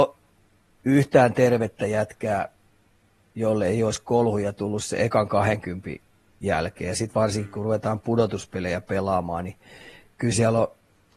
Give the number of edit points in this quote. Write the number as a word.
zero